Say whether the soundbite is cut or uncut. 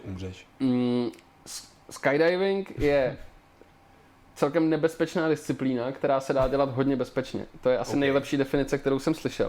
uncut